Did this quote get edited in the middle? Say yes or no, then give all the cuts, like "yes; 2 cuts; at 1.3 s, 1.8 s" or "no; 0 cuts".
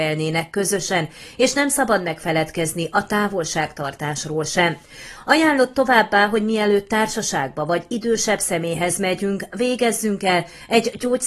no; 0 cuts